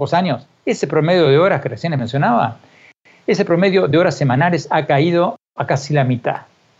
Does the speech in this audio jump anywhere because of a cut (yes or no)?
no